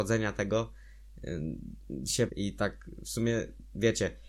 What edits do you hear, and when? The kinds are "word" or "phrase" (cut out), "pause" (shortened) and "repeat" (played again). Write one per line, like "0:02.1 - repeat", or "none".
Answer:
0:02.3 - word